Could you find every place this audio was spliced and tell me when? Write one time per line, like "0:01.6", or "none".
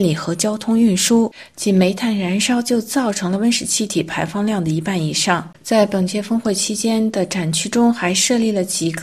0:05.5